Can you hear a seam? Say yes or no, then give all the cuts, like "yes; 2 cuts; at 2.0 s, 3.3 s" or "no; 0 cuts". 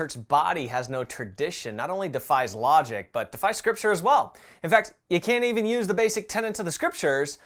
no; 0 cuts